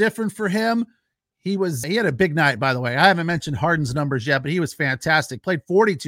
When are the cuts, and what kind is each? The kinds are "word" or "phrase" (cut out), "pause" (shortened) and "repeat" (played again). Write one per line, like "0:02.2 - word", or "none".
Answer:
0:01.8 - word